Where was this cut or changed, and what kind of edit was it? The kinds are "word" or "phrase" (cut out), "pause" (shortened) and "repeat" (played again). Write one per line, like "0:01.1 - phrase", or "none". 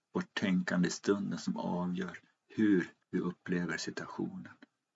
0:03.0 - pause